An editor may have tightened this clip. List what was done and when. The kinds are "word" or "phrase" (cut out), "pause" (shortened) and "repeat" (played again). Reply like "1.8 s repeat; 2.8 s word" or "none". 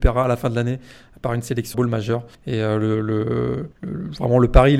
1.7 s phrase; 2.3 s pause; 3.7 s pause